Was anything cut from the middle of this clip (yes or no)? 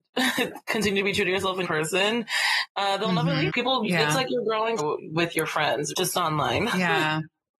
yes